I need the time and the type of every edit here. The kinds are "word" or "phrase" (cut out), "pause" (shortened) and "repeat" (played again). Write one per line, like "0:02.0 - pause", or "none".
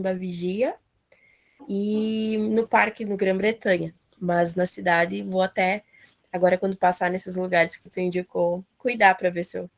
none